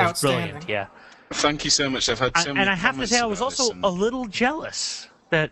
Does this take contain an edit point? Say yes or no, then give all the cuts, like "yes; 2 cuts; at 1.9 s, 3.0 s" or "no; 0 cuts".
no; 0 cuts